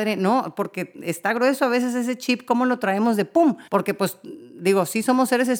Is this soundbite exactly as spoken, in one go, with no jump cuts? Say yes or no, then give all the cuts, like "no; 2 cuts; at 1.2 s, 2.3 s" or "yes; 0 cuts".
no; 1 cut; at 3.7 s